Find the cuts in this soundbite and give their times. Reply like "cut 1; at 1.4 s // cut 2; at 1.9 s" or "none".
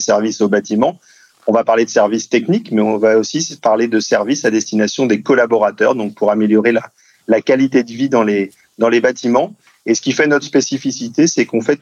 none